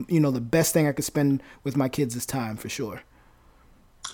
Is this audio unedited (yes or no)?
yes